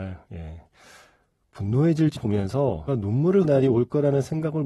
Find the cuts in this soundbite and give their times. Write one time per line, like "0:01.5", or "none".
0:02.2
0:02.9
0:03.4

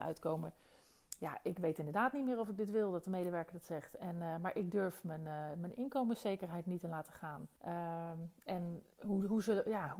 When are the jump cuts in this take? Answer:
0:07.6

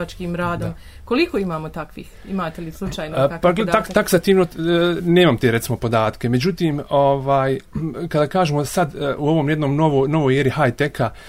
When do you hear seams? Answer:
none

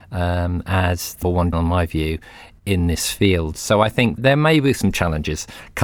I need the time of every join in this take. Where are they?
0:01.2
0:01.5
0:04.2

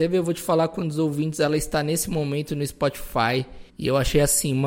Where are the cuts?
0:03.7

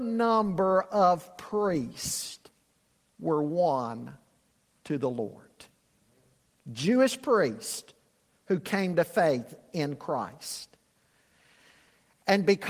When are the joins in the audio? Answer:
none

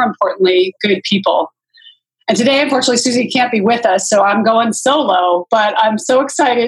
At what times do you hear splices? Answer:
none

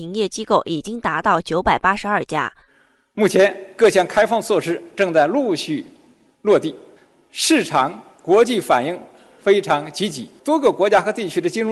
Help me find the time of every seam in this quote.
0:10.4

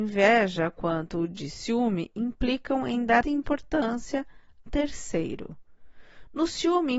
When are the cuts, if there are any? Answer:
0:03.2
0:04.7

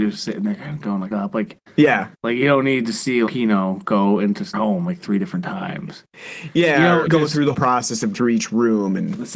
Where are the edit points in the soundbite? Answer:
0:01.1
0:02.1
0:03.3
0:04.5
0:07.1
0:07.5
0:08.1

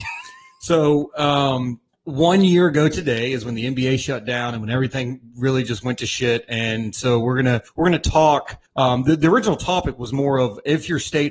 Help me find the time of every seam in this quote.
0:01.9
0:07.7
0:08.7

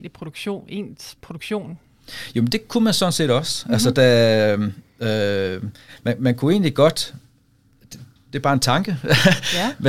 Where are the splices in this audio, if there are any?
none

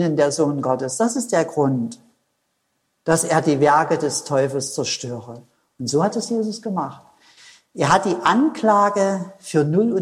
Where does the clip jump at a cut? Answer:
none

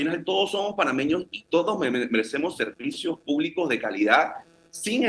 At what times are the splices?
none

